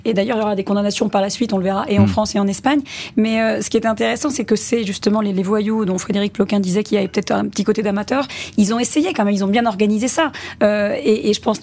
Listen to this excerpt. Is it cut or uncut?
uncut